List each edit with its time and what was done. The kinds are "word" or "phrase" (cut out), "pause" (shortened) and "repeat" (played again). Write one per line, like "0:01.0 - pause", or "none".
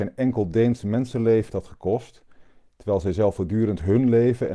0:01.5 - word